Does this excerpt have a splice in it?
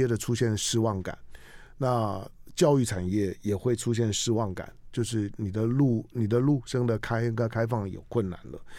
no; 0 cuts

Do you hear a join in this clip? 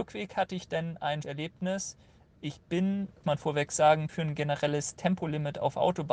yes; 3 cuts; at 1.2 s, 3.2 s, 4.1 s

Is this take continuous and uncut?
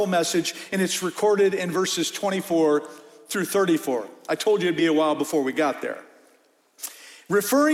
yes; 0 cuts

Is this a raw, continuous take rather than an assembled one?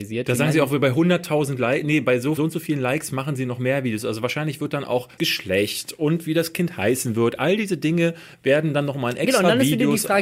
no; 2 cuts; at 2.4 s, 5.2 s

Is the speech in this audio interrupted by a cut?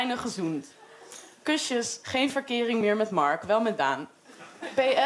no; 0 cuts

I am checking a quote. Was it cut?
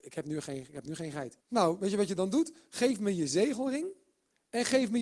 yes; 1 cut; at 1.4 s

